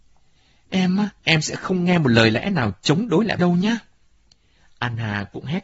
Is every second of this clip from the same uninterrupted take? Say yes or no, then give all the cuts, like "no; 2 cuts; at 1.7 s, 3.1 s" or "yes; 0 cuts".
no; 2 cuts; at 1.2 s, 3.4 s